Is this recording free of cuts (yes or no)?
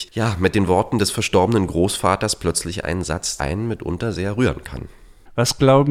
no